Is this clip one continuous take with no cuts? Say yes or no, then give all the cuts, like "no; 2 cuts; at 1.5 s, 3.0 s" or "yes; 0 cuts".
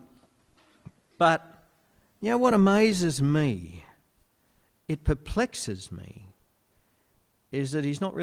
yes; 0 cuts